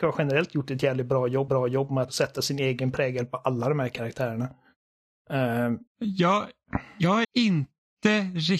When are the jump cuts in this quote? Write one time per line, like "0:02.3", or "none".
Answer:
0:01.5
0:02.1
0:05.9
0:07.2